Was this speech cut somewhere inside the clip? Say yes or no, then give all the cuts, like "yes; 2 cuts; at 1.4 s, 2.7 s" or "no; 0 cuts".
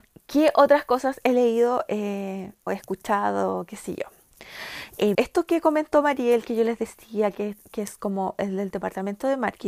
yes; 2 cuts; at 2.7 s, 5.1 s